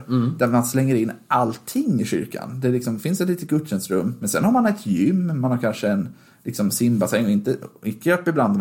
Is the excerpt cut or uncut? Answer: uncut